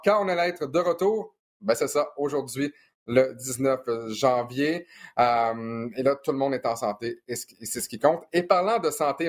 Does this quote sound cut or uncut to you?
uncut